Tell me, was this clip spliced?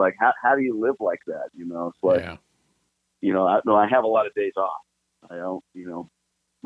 no; 0 cuts

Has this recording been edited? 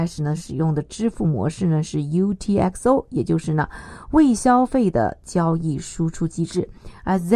no; 0 cuts

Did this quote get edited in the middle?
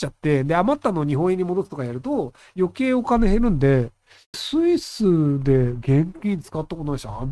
yes; 1 cut; at 4.3 s

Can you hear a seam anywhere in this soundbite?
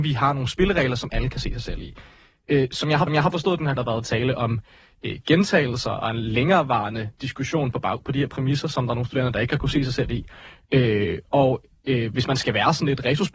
yes; 2 cuts; at 3.1 s, 3.8 s

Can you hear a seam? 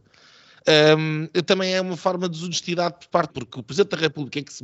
yes; 1 cut; at 3.3 s

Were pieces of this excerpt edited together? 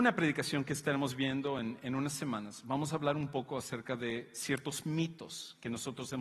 no; 0 cuts

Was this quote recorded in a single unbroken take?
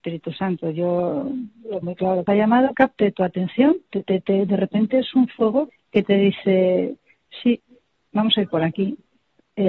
no; 5 cuts; at 1.8 s, 2.3 s, 2.7 s, 3.9 s, 5.7 s

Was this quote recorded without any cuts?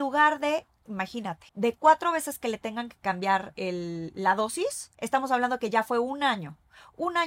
no; 3 cuts; at 1.5 s, 3.5 s, 4.9 s

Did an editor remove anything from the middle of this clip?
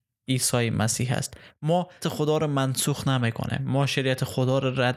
yes; 1 cut; at 2.0 s

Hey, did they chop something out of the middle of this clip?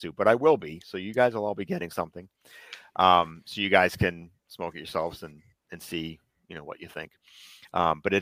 no; 0 cuts

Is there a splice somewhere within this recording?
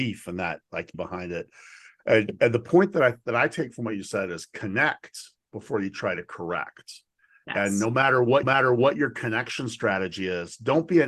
yes; 2 cuts; at 0.9 s, 8.4 s

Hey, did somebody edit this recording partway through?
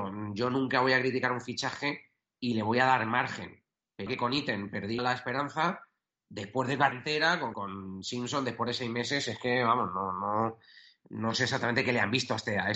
yes; 4 cuts; at 4.1 s, 5.0 s, 6.9 s, 7.5 s

